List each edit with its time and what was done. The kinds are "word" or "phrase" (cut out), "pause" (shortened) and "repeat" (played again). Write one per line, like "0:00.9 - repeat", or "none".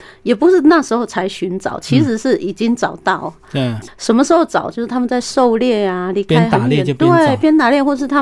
0:03.8 - word